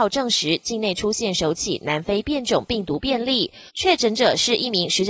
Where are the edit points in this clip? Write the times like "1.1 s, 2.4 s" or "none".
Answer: 3.7 s